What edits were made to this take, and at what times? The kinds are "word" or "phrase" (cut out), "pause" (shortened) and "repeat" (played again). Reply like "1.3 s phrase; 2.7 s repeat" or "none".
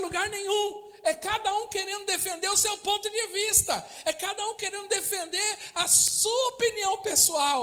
none